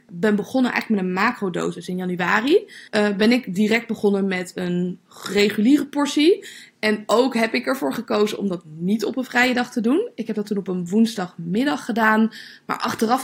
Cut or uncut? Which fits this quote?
cut